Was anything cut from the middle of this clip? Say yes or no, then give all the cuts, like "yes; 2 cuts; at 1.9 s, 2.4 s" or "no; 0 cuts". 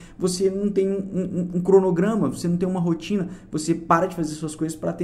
no; 0 cuts